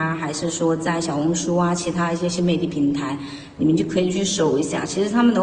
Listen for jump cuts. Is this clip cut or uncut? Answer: uncut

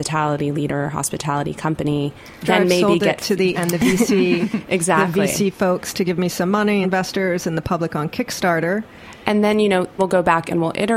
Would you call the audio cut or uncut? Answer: cut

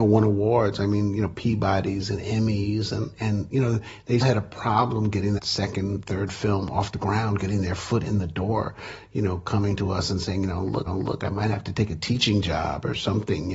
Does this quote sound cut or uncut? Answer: cut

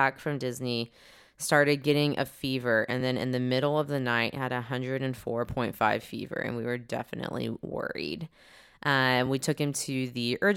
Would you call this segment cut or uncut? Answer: uncut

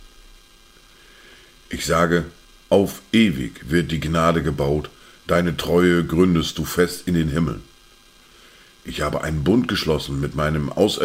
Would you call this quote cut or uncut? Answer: uncut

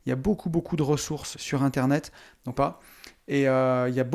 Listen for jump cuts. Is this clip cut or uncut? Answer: cut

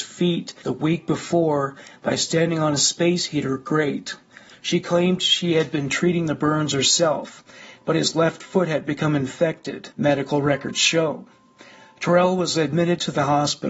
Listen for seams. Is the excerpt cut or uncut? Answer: uncut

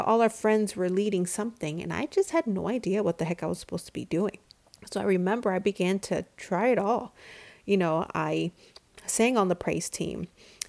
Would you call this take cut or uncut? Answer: uncut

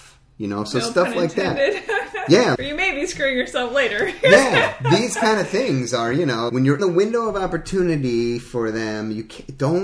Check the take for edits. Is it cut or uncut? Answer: cut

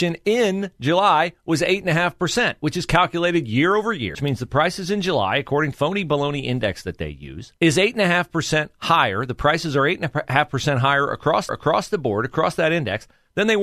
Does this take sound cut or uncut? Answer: cut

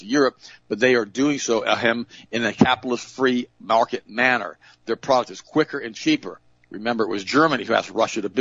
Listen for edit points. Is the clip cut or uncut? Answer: uncut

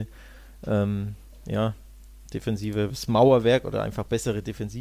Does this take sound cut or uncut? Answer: uncut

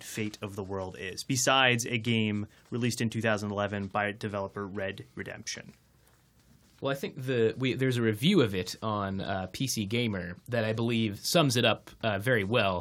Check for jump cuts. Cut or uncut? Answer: uncut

